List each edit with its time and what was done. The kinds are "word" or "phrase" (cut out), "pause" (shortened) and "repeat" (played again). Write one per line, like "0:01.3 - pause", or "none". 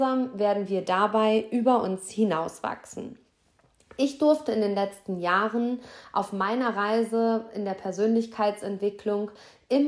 none